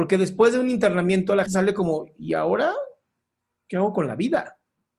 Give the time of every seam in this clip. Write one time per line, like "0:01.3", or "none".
0:01.5